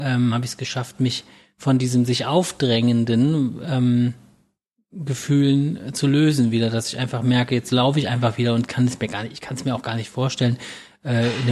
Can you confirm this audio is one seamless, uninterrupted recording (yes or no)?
yes